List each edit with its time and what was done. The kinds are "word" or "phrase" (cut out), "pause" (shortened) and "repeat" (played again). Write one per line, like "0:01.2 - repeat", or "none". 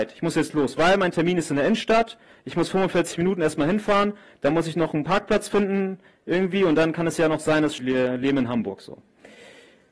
0:07.8 - phrase